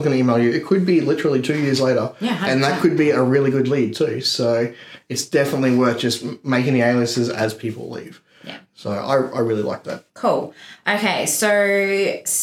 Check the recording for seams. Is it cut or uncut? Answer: cut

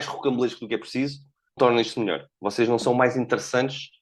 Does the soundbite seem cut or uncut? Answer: cut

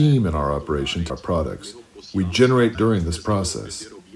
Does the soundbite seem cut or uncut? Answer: cut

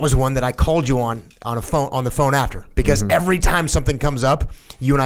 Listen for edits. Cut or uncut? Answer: uncut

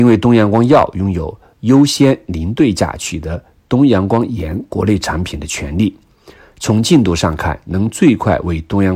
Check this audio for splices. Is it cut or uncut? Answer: uncut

